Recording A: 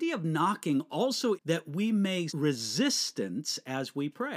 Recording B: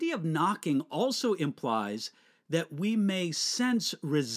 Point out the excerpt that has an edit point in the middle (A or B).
A